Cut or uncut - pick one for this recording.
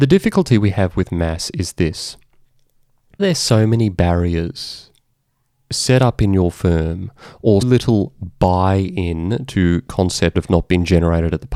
cut